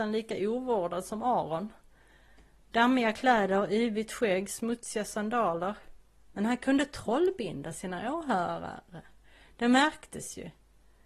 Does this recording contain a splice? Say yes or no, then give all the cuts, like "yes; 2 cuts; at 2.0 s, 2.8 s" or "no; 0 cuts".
no; 0 cuts